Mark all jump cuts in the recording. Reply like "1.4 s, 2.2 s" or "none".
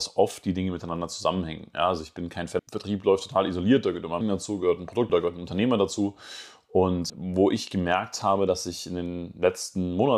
2.6 s, 4.2 s, 5.1 s, 7.1 s